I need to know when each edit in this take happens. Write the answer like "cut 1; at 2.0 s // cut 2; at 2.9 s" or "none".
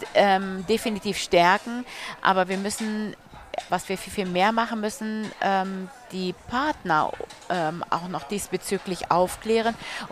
cut 1; at 3.7 s